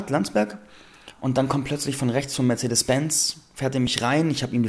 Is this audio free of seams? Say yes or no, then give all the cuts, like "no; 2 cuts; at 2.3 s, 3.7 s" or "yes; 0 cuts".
yes; 0 cuts